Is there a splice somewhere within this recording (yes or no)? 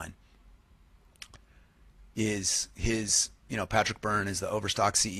no